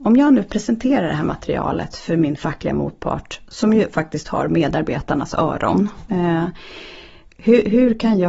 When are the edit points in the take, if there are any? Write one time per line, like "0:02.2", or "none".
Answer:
none